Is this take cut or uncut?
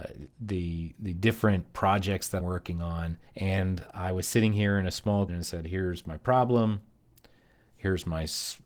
cut